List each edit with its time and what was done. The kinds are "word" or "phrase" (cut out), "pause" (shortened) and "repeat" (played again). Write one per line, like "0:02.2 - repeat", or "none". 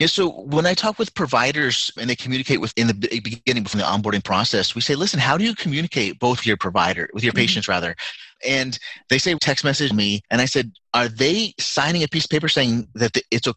0:02.0 - word
0:02.7 - word
0:03.7 - phrase
0:06.4 - phrase
0:09.4 - phrase
0:09.9 - phrase
0:10.8 - word